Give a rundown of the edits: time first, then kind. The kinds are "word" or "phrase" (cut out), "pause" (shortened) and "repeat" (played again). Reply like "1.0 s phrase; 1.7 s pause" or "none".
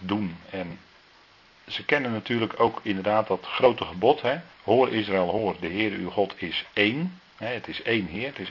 4.5 s pause; 7.3 s pause